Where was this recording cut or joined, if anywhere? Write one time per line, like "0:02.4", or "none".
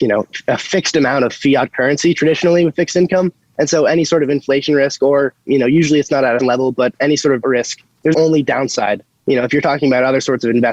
0:05.5
0:06.4
0:07.4
0:08.1